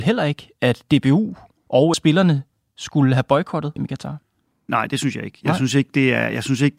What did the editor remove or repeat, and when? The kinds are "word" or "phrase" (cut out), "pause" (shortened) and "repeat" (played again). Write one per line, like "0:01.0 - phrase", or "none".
0:01.9 - word
0:03.8 - word